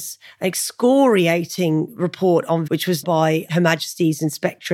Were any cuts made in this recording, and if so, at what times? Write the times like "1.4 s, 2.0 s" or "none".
2.7 s, 3.0 s